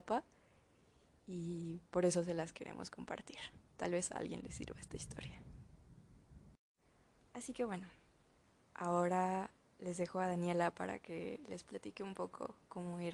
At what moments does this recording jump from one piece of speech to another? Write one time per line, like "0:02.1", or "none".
none